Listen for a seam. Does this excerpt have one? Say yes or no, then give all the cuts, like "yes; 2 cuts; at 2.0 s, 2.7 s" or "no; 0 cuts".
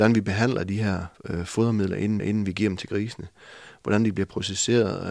yes; 2 cuts; at 1.1 s, 2.2 s